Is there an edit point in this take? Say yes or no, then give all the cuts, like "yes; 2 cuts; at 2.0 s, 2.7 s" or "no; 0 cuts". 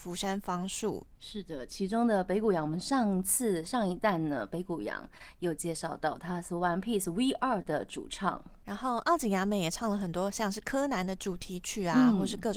no; 0 cuts